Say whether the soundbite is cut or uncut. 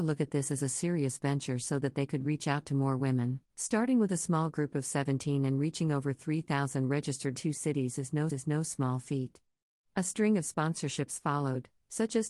cut